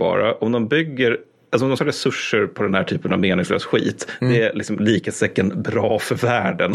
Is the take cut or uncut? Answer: cut